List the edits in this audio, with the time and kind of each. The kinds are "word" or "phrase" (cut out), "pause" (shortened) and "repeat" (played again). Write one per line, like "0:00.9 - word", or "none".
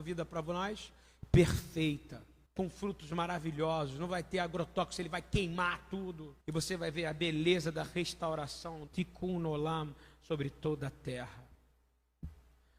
0:02.5 - pause
0:06.4 - pause
0:08.9 - word